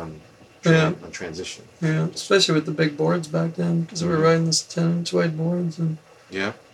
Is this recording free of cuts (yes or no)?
yes